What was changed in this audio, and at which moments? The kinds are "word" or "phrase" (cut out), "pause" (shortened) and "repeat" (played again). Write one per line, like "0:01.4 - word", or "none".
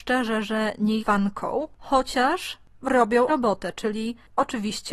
0:01.0 - phrase
0:03.3 - word